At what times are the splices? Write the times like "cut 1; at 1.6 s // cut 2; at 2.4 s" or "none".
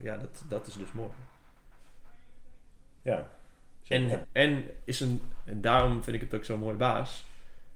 cut 1; at 4.2 s